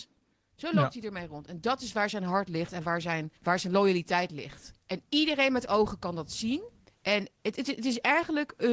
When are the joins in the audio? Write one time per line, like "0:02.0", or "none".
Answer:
0:03.4
0:06.8

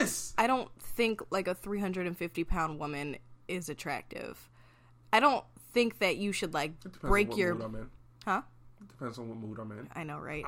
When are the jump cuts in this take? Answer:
none

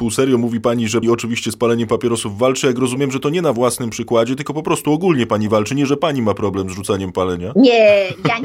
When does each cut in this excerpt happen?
0:01.0

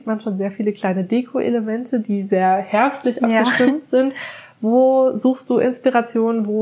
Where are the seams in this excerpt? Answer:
none

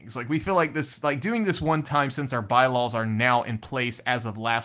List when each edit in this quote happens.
none

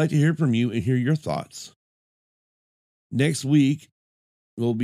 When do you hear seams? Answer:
none

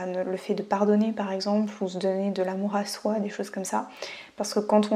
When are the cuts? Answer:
none

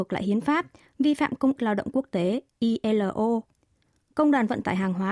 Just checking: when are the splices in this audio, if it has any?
0:01.6

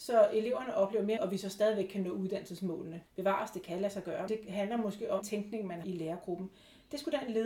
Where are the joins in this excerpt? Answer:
0:01.2
0:03.1
0:04.3
0:05.2
0:05.8

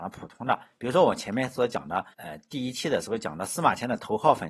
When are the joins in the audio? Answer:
0:02.1

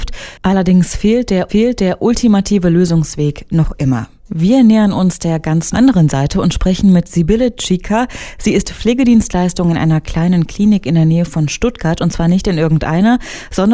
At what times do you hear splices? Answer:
0:01.5
0:04.2
0:05.7

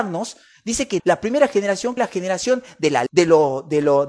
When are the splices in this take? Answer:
0:01.0
0:02.0
0:03.1

